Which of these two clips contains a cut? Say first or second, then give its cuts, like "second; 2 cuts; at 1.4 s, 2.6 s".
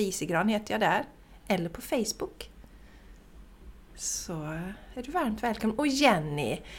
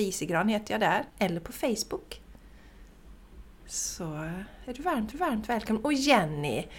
second; 2 cuts; at 1.1 s, 5.1 s